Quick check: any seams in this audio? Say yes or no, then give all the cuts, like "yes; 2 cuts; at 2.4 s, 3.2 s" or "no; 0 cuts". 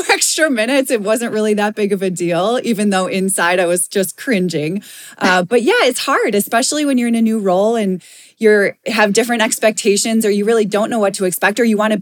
no; 0 cuts